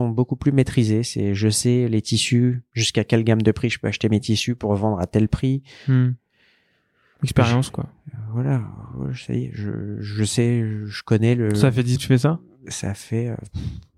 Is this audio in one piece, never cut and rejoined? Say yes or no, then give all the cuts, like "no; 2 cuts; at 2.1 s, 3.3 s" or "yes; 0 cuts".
no; 1 cut; at 12.0 s